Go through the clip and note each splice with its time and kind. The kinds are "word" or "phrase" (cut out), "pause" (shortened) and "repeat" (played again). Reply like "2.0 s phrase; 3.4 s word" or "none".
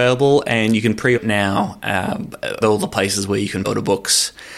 1.1 s word; 2.6 s word; 3.6 s word